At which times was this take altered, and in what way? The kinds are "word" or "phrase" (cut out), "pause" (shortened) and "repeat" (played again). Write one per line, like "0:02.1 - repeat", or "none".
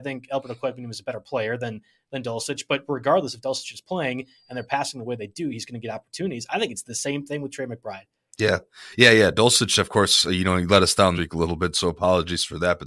0:11.1 - word

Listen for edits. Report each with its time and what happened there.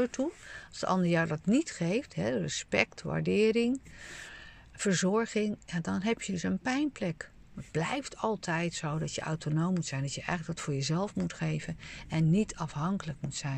none

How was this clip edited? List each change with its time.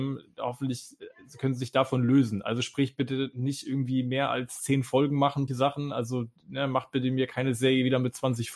0:05.5 - phrase

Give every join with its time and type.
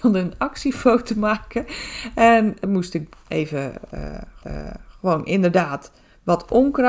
0:02.6 - phrase
0:04.4 - repeat

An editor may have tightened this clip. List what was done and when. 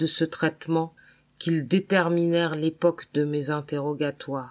none

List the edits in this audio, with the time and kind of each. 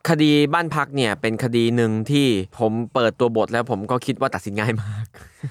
0:02.5 - pause

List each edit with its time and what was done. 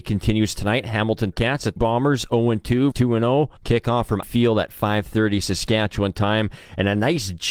0:01.3 - word
0:01.8 - phrase
0:02.9 - word
0:03.6 - pause
0:04.2 - word

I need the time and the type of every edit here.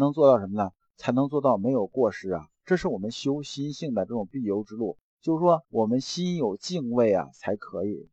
0:05.6 - pause

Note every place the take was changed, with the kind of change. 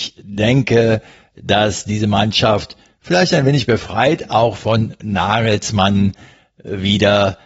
none

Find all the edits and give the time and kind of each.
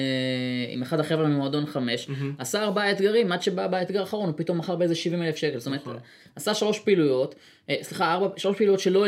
none

